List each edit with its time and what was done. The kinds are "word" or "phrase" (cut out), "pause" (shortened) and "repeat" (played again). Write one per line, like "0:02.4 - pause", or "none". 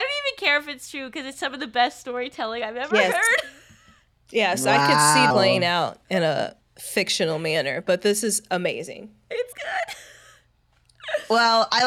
0:05.3 - phrase
0:06.0 - pause
0:09.5 - word